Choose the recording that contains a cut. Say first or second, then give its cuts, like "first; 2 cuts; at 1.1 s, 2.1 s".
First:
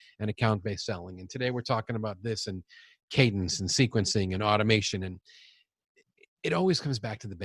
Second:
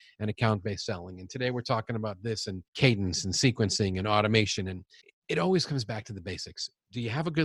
second; 2 cuts; at 2.7 s, 5.0 s